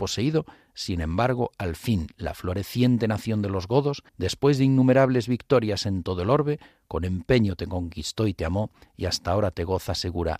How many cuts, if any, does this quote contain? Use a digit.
1